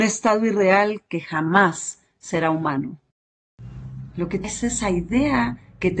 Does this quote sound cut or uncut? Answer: cut